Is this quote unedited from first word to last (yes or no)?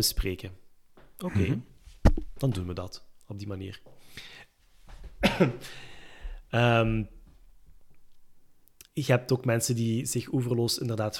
no